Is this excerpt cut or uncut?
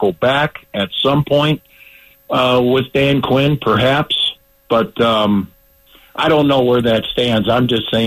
uncut